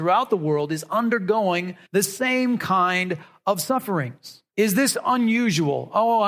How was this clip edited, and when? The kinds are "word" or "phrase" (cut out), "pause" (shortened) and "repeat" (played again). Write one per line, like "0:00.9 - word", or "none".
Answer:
0:01.9 - pause
0:04.5 - pause